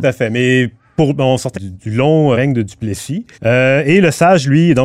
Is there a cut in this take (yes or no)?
yes